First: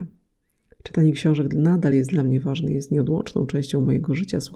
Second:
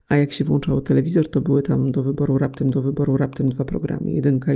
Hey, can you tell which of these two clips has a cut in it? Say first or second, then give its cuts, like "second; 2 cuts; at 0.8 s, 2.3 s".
second; 1 cut; at 2.7 s